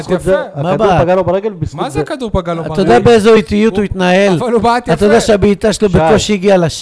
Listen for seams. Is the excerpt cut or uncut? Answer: uncut